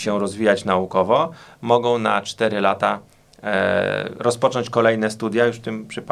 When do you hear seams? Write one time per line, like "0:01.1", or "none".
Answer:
none